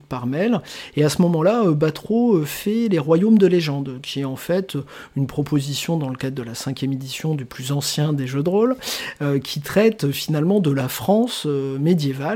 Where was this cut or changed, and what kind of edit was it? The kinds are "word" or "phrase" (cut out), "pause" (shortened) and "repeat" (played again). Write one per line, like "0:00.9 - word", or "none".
none